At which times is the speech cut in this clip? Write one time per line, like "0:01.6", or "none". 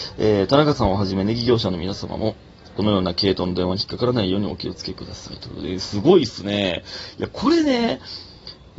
none

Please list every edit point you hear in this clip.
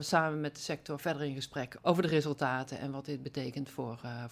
0:01.8

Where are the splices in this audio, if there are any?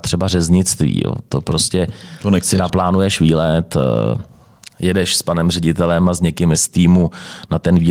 0:06.5

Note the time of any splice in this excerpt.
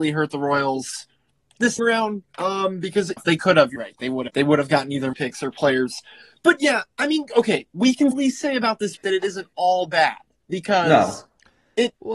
0:01.8
0:03.2
0:03.8
0:04.3
0:05.1
0:08.1
0:09.0

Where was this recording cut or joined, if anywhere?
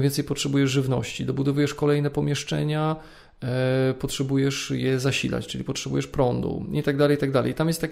none

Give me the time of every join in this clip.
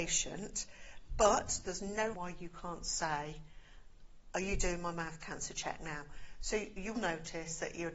0:02.1
0:06.9

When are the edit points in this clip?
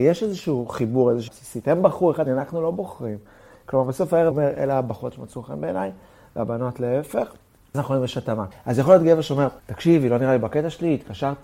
0:01.3
0:02.3
0:04.3
0:07.7

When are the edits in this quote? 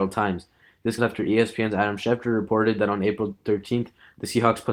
0:01.0

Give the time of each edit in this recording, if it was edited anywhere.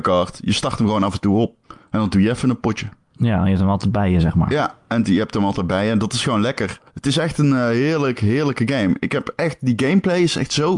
0:01.6
0:06.9

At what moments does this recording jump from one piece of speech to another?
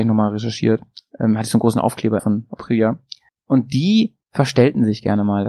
0:02.2
0:03.3
0:04.2

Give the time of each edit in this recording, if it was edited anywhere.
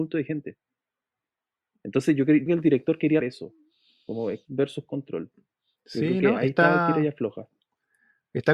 0:02.5
0:03.2
0:04.4

